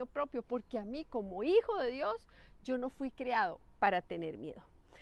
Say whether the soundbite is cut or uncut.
uncut